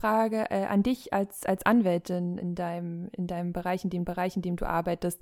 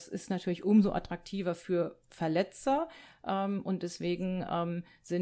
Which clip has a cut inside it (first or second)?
first